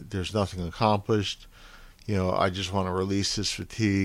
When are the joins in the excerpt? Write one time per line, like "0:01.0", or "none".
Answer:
none